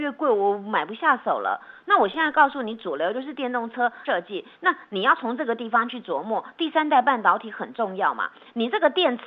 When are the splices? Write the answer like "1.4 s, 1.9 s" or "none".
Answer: 4.1 s